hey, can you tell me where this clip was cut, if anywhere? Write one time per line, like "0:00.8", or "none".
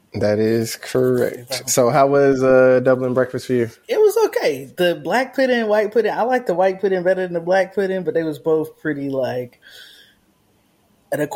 none